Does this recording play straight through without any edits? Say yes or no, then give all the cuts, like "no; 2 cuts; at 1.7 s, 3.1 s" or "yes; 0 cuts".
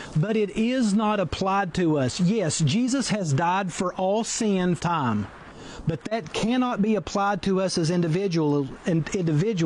no; 1 cut; at 4.8 s